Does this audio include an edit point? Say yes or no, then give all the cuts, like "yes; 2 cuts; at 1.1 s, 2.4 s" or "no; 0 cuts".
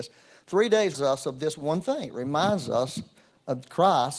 yes; 1 cut; at 0.9 s